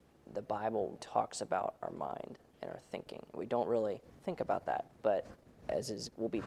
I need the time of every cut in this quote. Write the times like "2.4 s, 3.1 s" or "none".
1.0 s, 2.5 s, 3.3 s, 4.9 s